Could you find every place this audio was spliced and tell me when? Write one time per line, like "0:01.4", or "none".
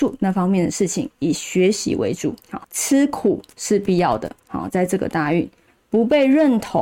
0:02.4